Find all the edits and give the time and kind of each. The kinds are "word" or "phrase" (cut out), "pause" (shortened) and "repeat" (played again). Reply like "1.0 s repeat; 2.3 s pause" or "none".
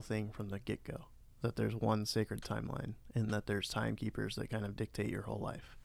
none